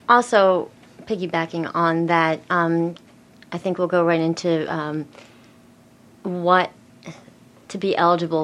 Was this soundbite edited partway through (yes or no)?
no